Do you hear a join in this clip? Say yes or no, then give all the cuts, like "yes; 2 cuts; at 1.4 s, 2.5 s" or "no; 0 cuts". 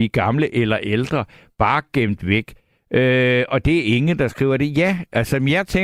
no; 0 cuts